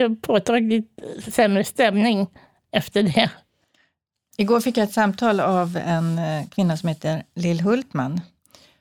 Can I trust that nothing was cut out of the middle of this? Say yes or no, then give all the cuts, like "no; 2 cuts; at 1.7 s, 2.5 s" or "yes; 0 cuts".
yes; 0 cuts